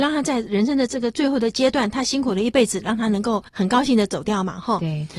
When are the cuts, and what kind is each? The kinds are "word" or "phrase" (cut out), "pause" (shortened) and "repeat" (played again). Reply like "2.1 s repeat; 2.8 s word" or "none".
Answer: 3.5 s pause